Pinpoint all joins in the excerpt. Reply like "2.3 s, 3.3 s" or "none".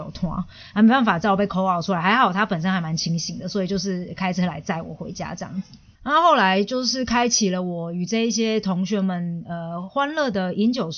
5.9 s